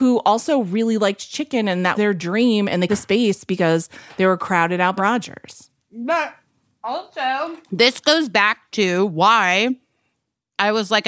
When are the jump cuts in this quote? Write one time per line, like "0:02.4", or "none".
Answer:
0:01.9
0:02.9
0:05.0
0:07.6